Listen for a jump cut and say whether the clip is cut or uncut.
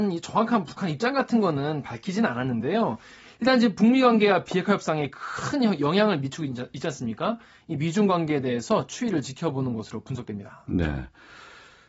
uncut